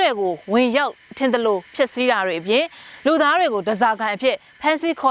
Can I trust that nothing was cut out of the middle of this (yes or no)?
yes